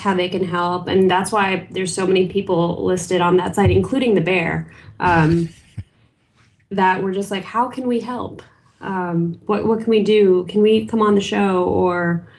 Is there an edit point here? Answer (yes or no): no